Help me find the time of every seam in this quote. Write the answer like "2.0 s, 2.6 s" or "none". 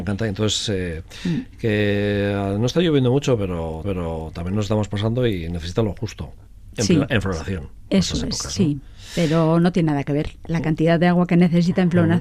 3.8 s